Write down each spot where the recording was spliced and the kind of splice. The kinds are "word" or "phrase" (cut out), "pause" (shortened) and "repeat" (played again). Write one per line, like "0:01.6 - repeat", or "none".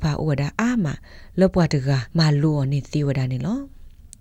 0:02.1 - pause